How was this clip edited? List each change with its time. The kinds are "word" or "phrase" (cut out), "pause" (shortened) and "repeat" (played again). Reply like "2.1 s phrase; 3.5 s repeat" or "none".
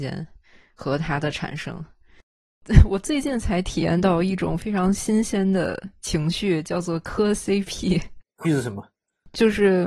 8.4 s word